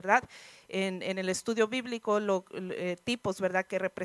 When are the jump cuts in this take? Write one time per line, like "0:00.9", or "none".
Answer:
none